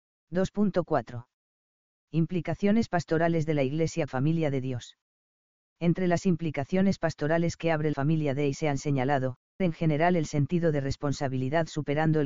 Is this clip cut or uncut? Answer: cut